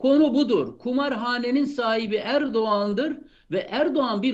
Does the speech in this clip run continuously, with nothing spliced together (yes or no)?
yes